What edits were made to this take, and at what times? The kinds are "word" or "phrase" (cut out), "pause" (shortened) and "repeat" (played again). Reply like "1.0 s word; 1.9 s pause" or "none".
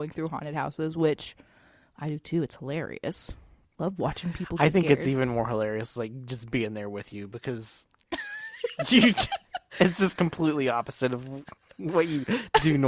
none